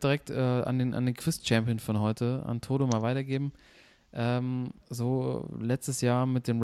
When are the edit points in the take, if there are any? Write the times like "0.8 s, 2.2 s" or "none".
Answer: 4.8 s